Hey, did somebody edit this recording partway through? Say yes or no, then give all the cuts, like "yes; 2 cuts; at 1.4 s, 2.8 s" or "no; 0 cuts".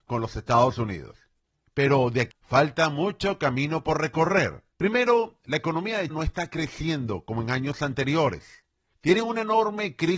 yes; 3 cuts; at 2.3 s, 4.7 s, 6.1 s